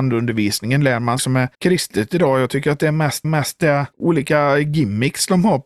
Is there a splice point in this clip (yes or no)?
yes